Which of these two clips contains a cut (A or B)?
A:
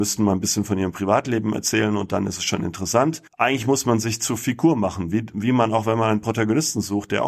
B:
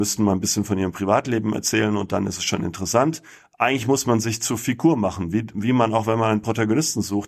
A